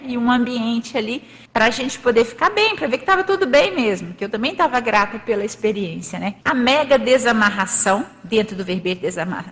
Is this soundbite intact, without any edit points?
no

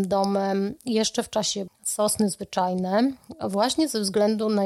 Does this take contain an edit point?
yes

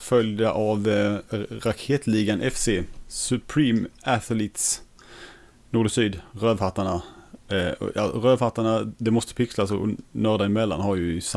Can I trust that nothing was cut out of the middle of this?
yes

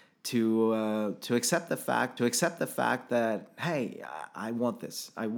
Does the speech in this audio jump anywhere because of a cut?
yes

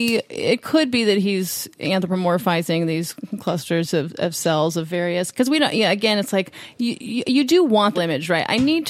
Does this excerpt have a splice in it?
yes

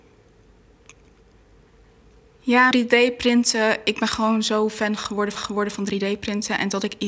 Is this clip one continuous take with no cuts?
no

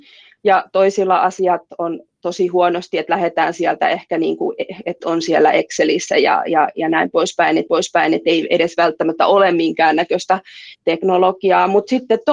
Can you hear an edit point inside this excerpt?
yes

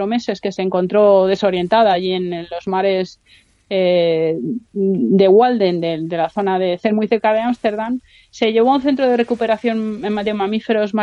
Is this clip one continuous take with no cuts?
yes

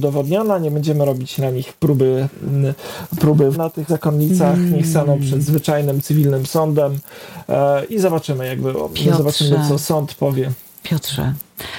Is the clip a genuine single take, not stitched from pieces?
no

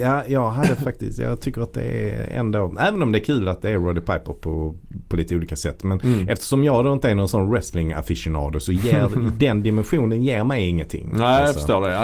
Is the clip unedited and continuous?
yes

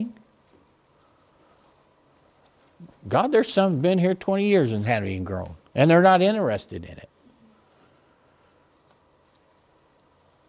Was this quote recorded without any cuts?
no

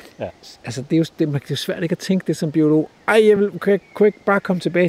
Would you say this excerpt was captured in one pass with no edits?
yes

